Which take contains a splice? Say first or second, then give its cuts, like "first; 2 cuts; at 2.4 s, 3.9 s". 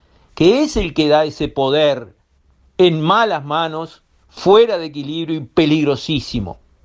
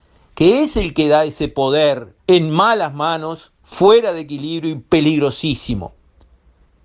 second; 2 cuts; at 2.2 s, 3.6 s